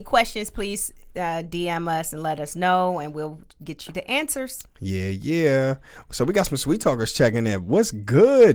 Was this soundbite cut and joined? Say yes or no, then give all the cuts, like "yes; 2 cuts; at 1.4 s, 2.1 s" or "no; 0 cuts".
no; 0 cuts